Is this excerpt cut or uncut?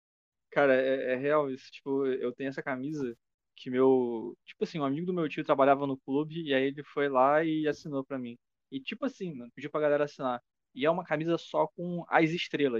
uncut